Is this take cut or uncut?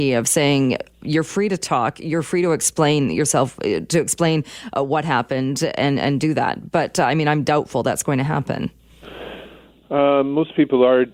uncut